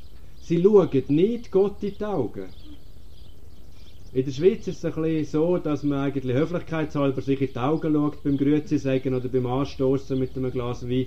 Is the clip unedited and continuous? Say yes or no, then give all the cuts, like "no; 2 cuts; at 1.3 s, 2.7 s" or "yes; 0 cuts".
yes; 0 cuts